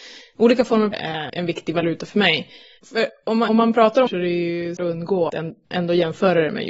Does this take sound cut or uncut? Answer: cut